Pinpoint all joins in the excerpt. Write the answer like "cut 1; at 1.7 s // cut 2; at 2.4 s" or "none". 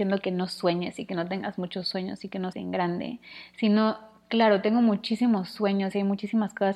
cut 1; at 2.5 s